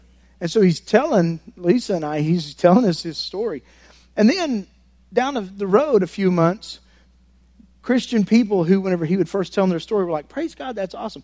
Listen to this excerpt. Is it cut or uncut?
uncut